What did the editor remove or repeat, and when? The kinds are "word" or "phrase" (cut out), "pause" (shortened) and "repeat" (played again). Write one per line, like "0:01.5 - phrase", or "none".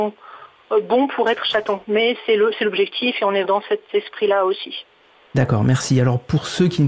0:03.4 - word